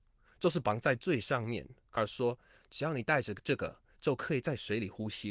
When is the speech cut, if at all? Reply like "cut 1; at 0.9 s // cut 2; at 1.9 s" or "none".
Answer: cut 1; at 2.0 s